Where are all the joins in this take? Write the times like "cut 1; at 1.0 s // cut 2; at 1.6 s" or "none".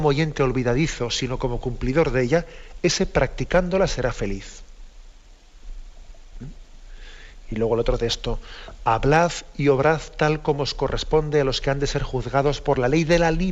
none

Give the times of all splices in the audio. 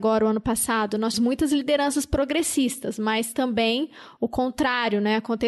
cut 1; at 1.1 s

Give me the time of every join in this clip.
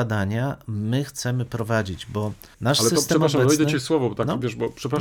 cut 1; at 2.5 s

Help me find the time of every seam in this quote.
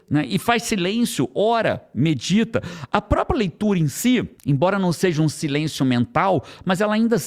cut 1; at 4.4 s

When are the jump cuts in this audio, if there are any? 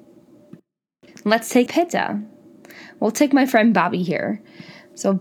cut 1; at 1.1 s // cut 2; at 1.7 s

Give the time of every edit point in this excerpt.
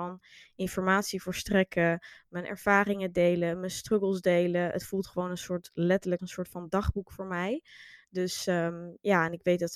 cut 1; at 6.2 s

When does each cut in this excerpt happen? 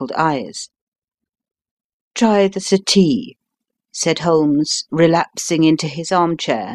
none

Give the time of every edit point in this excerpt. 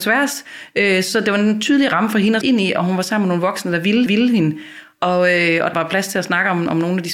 cut 1; at 2.4 s // cut 2; at 4.1 s // cut 3; at 5.7 s

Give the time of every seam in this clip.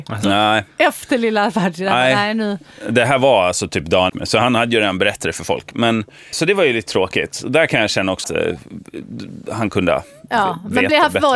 cut 1; at 4.1 s // cut 2; at 6.3 s // cut 3; at 8.2 s

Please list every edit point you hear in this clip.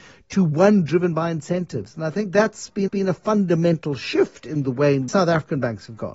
cut 1; at 2.9 s // cut 2; at 5.1 s

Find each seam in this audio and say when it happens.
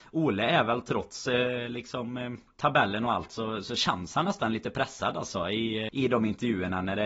cut 1; at 5.9 s

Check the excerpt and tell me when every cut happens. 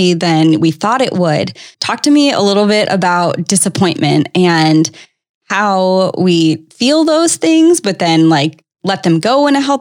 cut 1; at 1.7 s // cut 2; at 6.7 s

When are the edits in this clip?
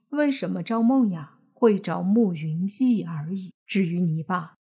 cut 1; at 3.6 s

